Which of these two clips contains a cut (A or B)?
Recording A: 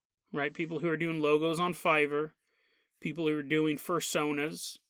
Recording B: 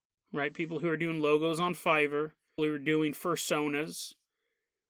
B